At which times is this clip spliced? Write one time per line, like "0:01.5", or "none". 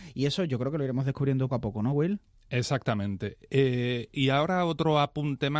0:01.5